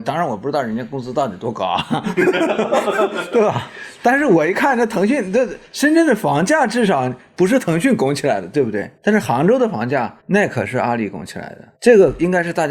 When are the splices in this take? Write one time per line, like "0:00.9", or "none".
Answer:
0:09.0
0:10.2
0:11.8